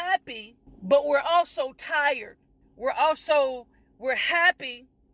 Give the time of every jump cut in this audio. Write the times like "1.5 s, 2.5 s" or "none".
none